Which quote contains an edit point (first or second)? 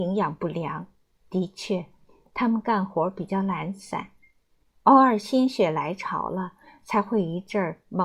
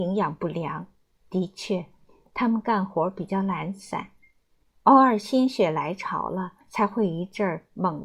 second